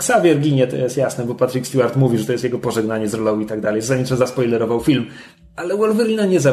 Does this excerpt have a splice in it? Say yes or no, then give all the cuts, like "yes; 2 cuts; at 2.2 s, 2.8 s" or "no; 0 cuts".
no; 0 cuts